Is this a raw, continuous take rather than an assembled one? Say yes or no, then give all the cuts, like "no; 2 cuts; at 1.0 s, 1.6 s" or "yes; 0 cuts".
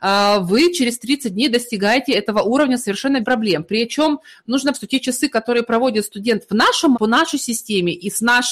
no; 3 cuts; at 3.2 s, 4.7 s, 6.9 s